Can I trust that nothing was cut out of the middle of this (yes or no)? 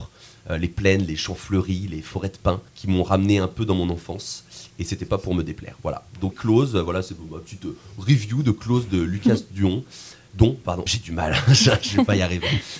no